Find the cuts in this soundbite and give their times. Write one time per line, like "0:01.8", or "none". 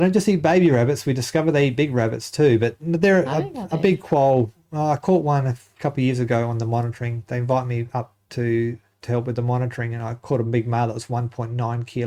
none